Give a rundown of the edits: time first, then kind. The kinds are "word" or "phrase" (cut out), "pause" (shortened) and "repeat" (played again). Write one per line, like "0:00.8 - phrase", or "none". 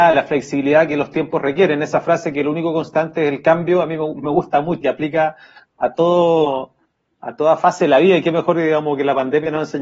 0:04.8 - word